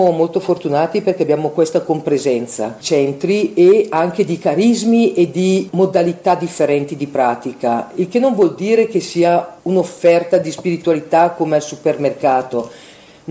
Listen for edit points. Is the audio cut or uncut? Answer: cut